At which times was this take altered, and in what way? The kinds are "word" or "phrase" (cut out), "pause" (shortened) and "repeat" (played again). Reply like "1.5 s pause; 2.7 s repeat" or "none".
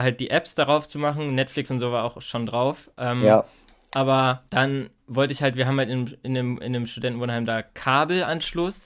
4.5 s pause